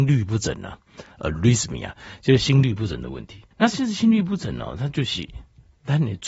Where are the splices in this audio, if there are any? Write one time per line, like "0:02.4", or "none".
0:03.5